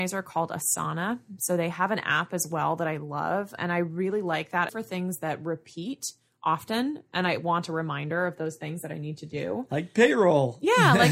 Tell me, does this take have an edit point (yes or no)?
yes